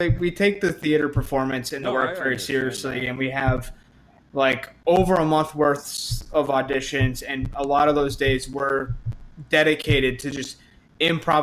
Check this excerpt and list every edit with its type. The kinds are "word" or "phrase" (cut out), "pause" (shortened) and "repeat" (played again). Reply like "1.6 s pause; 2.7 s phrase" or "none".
none

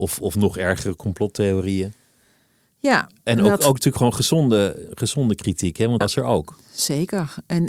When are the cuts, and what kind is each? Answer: 6.0 s word

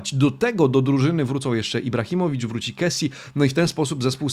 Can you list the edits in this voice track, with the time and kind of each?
none

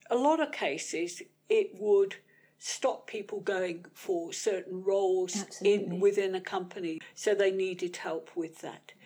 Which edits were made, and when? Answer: none

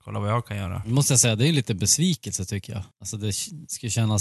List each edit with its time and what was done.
2.9 s pause

